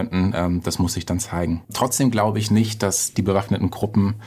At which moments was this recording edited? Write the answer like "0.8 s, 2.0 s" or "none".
1.6 s